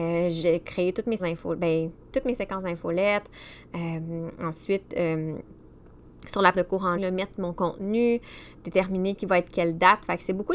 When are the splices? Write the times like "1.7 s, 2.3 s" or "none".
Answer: 1.2 s, 2.1 s, 6.5 s, 7.0 s, 9.2 s